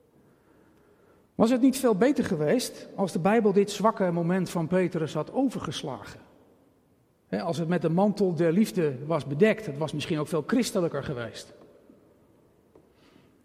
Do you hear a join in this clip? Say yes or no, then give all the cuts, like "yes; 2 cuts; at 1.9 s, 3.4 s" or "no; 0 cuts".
no; 0 cuts